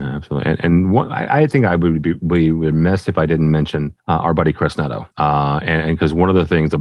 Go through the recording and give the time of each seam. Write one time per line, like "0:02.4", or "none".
0:04.0
0:05.1